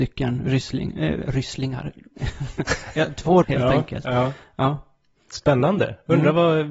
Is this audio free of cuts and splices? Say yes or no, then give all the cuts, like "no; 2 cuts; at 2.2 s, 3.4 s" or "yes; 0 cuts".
no; 1 cut; at 3.4 s